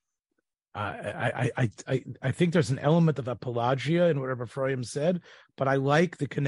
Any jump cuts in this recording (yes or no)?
no